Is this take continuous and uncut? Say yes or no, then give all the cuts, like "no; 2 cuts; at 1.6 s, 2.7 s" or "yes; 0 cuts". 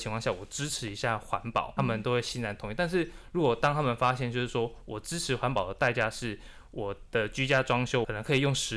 no; 1 cut; at 1.8 s